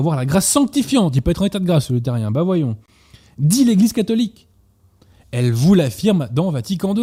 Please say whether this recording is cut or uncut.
uncut